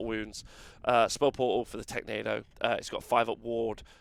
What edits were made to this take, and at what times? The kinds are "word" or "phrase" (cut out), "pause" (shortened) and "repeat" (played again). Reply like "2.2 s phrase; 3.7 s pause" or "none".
2.5 s pause